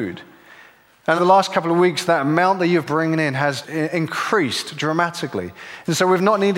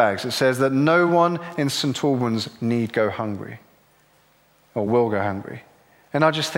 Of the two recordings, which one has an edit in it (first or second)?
first